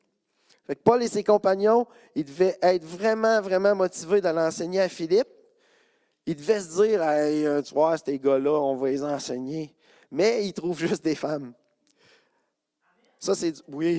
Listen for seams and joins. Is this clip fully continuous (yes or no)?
yes